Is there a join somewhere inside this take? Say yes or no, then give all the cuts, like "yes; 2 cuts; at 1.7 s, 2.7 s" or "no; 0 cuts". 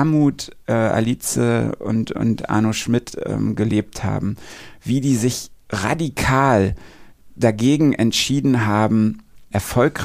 no; 0 cuts